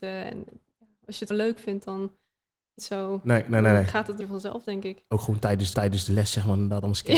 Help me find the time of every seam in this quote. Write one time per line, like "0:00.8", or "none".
0:01.3
0:02.8
0:04.2
0:05.7